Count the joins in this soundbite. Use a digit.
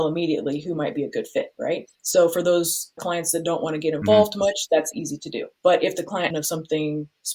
4